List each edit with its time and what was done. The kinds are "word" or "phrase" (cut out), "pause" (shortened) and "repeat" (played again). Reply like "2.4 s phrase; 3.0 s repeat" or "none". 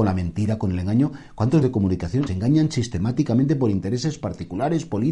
1.6 s word; 2.3 s word